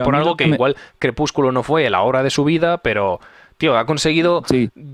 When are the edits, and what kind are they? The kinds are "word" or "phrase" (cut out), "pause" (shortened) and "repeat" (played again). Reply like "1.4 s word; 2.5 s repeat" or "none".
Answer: none